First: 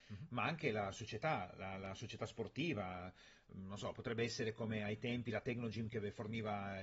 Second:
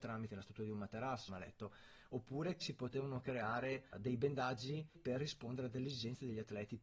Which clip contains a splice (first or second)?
second